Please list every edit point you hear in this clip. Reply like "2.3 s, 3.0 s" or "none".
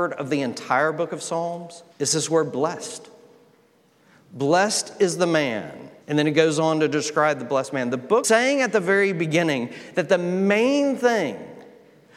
1.9 s, 6.0 s, 8.2 s